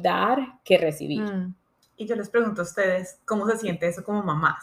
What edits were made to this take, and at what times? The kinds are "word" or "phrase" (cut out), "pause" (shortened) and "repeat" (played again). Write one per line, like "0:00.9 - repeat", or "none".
none